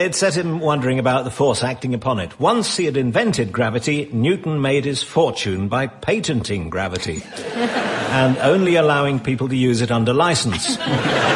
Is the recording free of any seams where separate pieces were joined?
yes; 0 cuts

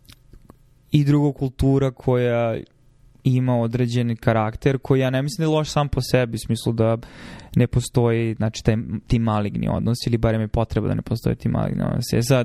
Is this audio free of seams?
yes; 0 cuts

